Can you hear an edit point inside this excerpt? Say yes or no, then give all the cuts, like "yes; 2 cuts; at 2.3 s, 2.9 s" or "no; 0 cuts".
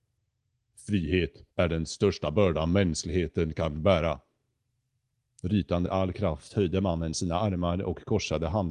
yes; 2 cuts; at 1.5 s, 5.9 s